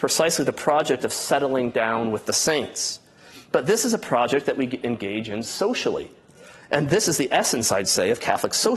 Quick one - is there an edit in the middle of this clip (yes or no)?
no